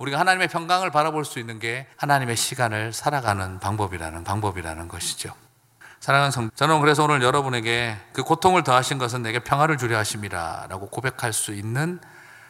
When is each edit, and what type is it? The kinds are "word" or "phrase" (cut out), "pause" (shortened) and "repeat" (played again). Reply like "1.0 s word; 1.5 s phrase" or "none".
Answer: 1.9 s pause; 4.2 s repeat; 6.5 s word